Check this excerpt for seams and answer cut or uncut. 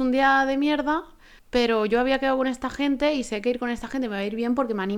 cut